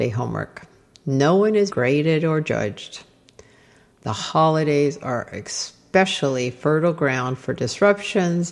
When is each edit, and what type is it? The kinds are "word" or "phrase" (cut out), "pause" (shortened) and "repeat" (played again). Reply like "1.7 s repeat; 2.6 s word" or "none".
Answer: 1.7 s word